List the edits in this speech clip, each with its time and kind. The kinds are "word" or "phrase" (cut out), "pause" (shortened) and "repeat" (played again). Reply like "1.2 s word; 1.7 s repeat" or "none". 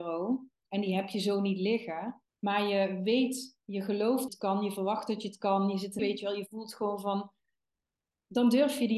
2.3 s pause; 3.6 s pause; 4.3 s phrase; 6.0 s phrase